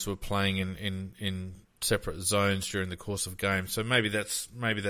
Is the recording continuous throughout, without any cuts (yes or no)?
yes